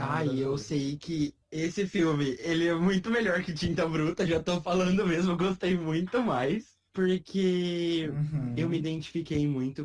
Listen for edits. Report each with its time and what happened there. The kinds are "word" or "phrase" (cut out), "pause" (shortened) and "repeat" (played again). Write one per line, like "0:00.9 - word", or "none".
0:01.4 - pause
0:06.9 - pause